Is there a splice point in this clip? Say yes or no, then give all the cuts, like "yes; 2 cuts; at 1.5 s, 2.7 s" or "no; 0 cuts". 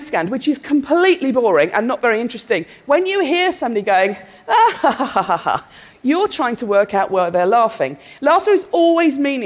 no; 0 cuts